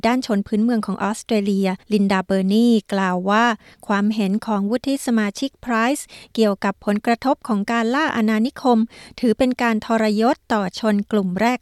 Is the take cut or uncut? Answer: cut